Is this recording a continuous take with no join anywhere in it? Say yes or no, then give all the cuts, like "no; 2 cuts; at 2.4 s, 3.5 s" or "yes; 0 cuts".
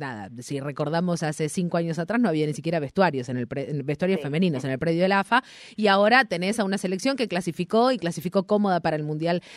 yes; 0 cuts